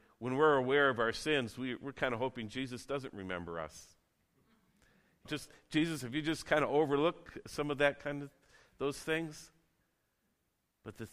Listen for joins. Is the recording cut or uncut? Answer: cut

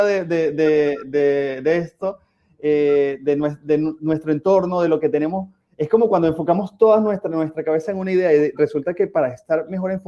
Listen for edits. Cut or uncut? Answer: uncut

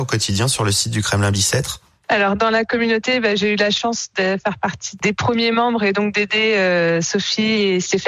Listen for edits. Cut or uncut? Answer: uncut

